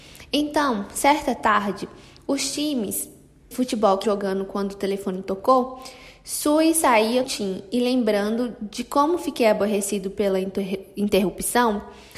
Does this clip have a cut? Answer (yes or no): yes